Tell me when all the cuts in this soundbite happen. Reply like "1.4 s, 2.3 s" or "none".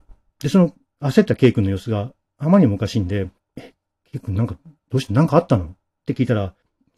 none